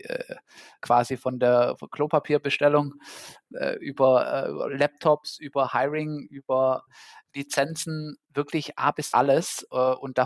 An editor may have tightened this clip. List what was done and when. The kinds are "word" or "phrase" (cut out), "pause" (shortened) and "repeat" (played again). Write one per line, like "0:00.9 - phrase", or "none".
0:08.2 - pause
0:09.1 - word